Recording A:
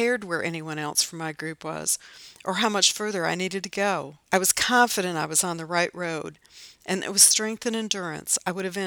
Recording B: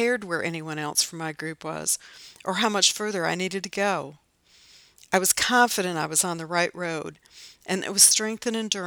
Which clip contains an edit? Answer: A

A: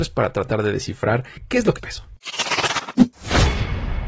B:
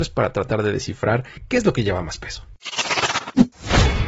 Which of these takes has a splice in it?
A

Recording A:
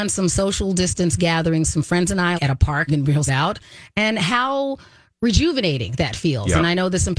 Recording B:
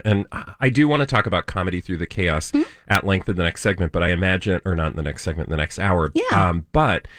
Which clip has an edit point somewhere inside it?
A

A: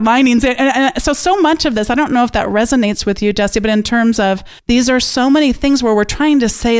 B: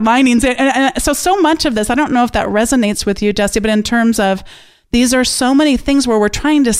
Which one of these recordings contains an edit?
A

